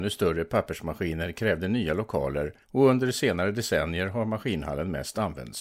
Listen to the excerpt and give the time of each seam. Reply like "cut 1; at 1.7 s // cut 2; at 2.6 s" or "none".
cut 1; at 2.6 s